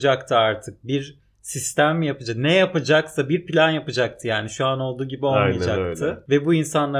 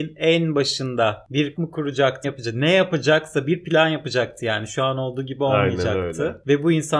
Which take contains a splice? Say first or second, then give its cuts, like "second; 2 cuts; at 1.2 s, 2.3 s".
second; 2 cuts; at 1.6 s, 2.2 s